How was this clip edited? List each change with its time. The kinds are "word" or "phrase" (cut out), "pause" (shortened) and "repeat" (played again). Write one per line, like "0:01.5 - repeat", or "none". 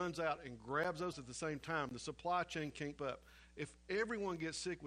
0:01.1 - word
0:03.0 - word